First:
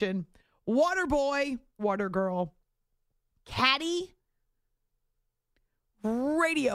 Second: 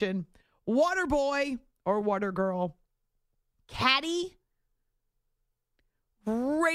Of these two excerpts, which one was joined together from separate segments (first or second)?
first